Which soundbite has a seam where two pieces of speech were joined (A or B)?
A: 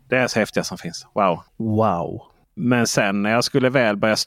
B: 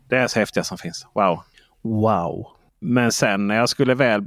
A